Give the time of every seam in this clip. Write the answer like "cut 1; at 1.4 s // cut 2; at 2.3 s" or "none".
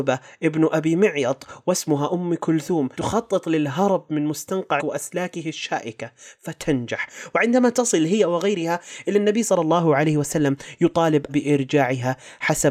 cut 1; at 2.9 s // cut 2; at 4.8 s // cut 3; at 11.3 s